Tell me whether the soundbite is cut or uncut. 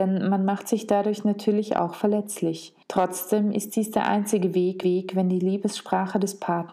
cut